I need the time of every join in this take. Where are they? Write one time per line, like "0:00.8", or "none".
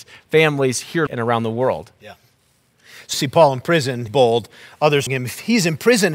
0:01.1
0:03.1
0:04.1
0:05.1